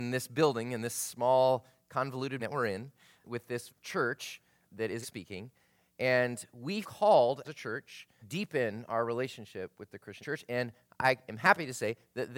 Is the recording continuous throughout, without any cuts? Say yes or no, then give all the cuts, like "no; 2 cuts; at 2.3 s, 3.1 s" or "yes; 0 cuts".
no; 9 cuts; at 2.4 s, 3.2 s, 3.7 s, 4.6 s, 5.0 s, 6.8 s, 7.4 s, 8.2 s, 10.2 s